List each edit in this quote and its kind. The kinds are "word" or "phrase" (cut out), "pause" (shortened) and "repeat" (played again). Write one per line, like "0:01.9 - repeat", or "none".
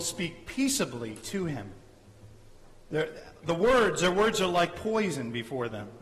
none